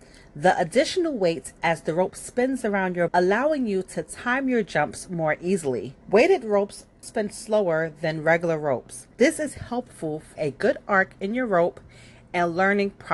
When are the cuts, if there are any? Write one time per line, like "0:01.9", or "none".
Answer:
0:01.6
0:03.1
0:06.0
0:07.0
0:09.1
0:10.4